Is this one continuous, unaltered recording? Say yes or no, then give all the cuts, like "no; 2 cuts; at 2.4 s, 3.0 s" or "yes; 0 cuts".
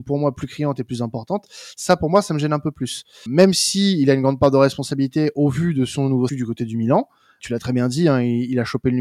no; 3 cuts; at 3.3 s, 6.3 s, 7.4 s